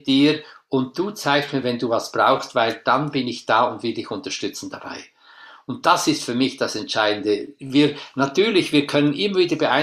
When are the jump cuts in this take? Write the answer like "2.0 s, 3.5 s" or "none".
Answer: none